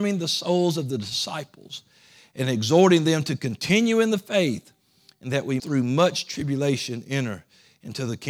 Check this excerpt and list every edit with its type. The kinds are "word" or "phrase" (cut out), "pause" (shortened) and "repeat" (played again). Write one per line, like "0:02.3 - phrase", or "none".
0:05.6 - word